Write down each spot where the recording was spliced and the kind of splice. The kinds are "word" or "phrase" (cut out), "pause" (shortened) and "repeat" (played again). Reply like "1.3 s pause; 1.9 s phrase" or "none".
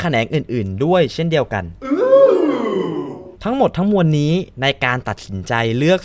3.3 s pause